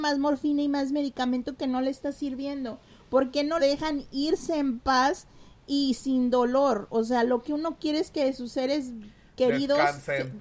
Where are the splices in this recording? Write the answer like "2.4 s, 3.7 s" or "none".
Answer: 3.6 s

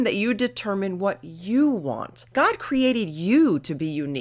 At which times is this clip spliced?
2.3 s

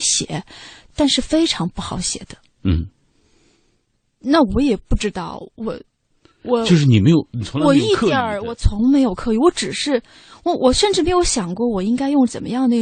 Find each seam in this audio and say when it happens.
none

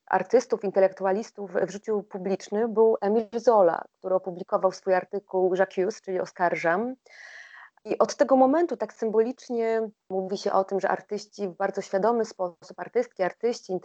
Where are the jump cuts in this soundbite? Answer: none

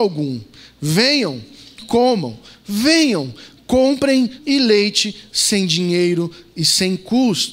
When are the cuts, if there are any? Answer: 1.8 s, 4.4 s

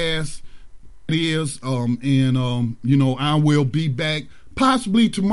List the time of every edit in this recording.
1.1 s

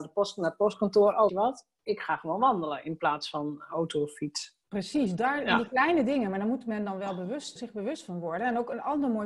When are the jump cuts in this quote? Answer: 1.3 s, 4.6 s, 7.6 s

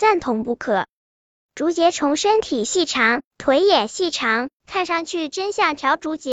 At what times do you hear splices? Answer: 1.2 s

